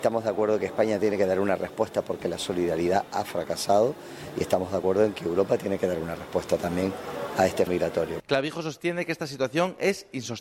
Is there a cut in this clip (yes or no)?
yes